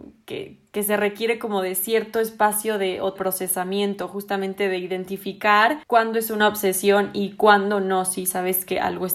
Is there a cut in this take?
yes; 2 cuts; at 3.2 s, 5.8 s

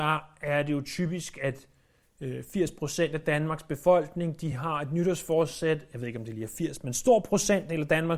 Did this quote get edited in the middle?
no; 0 cuts

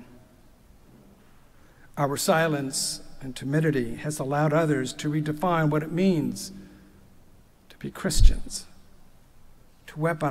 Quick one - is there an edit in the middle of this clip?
no; 0 cuts

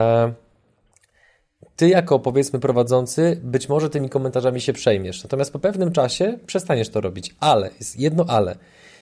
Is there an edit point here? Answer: no; 0 cuts

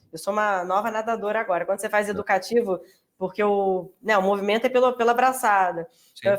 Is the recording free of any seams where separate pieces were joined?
yes; 0 cuts

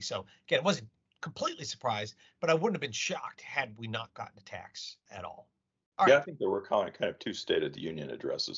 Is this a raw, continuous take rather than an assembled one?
yes; 0 cuts

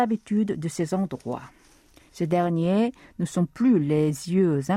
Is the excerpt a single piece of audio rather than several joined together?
yes; 0 cuts

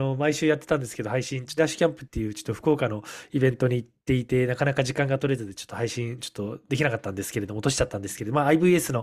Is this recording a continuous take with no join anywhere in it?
no; 1 cut; at 1.6 s

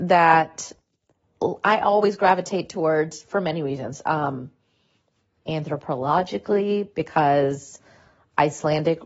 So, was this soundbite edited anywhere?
no; 0 cuts

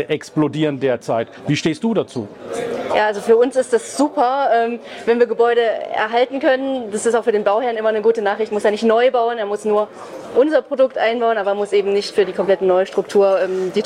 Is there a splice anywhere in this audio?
no; 0 cuts

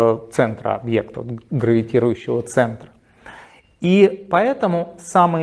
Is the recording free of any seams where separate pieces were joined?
yes; 0 cuts

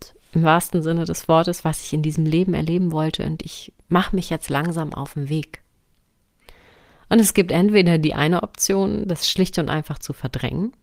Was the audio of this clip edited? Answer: no; 0 cuts

